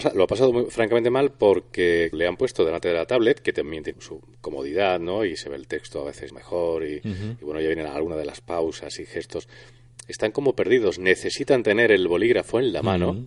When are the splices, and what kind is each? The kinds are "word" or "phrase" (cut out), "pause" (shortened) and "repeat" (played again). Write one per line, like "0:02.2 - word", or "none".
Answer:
0:02.1 - word
0:03.9 - word
0:06.3 - word